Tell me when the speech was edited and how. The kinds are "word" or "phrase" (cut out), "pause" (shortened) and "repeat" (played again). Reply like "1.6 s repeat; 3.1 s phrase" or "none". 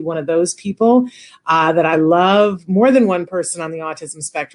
none